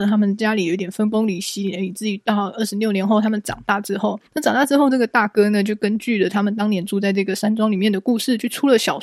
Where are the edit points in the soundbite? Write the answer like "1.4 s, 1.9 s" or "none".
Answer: 4.3 s